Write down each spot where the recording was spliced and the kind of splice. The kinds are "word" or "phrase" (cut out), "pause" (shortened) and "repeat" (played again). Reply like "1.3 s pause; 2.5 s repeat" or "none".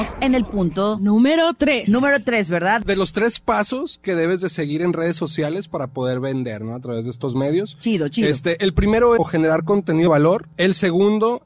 9.2 s phrase; 10.1 s word